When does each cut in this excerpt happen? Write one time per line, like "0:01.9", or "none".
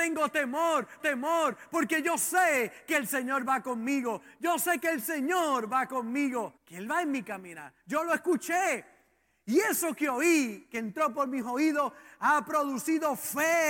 0:01.0
0:06.6